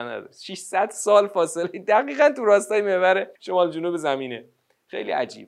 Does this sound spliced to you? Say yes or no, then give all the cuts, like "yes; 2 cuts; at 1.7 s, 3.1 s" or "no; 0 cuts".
yes; 1 cut; at 3.4 s